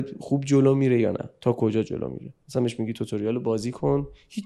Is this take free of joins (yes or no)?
yes